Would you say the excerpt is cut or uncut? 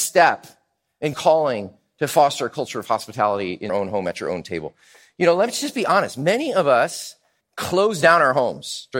cut